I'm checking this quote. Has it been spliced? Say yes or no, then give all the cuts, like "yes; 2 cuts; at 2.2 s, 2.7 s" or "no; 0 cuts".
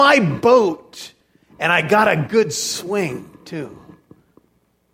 no; 0 cuts